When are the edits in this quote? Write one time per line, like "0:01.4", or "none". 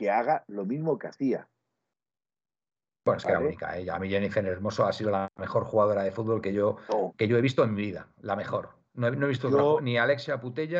none